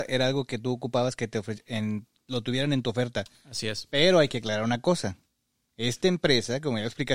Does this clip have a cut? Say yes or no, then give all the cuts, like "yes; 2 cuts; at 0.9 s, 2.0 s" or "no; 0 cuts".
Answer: no; 0 cuts